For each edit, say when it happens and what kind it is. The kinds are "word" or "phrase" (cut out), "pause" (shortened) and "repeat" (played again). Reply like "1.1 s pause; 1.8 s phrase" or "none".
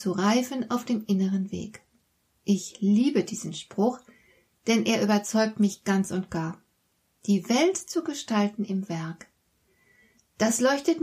none